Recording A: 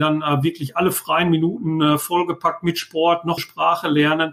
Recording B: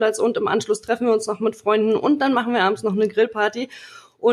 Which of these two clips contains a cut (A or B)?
A